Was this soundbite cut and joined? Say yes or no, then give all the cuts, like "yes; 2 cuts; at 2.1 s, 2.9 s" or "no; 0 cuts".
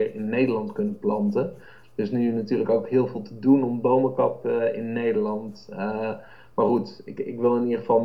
no; 0 cuts